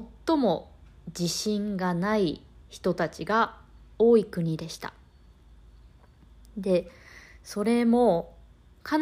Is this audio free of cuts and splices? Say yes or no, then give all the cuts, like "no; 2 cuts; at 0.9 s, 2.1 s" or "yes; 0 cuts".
yes; 0 cuts